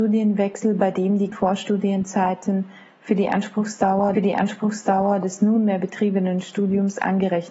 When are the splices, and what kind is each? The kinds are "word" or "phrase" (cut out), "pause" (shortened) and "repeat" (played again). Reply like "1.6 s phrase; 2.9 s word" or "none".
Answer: 1.3 s word; 4.1 s repeat